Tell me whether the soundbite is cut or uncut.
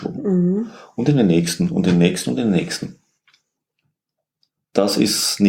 uncut